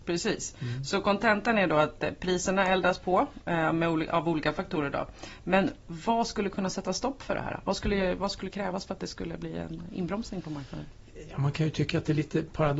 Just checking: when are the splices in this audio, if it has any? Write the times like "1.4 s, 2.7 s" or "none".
none

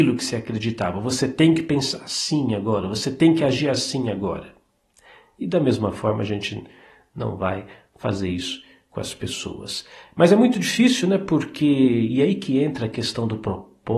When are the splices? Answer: none

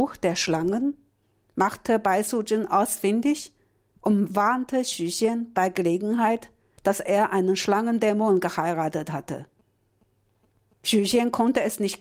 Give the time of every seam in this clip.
none

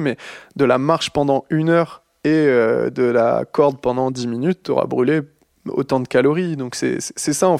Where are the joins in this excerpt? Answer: none

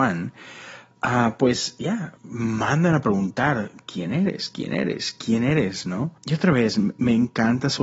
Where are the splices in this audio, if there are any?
2.2 s, 6.2 s

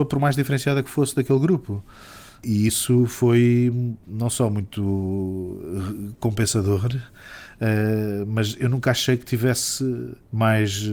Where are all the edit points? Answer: none

